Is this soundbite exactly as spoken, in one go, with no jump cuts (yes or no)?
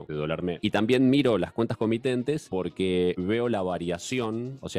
yes